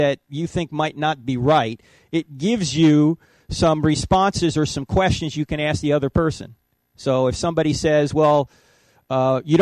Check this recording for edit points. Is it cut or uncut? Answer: uncut